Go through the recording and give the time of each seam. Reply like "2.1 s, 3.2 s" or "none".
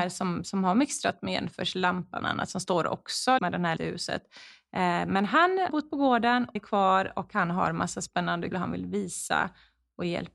2.2 s, 3.4 s, 3.8 s, 5.7 s, 6.6 s, 8.5 s